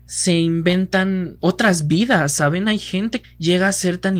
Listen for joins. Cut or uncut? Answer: cut